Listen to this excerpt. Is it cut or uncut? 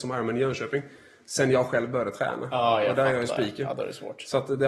uncut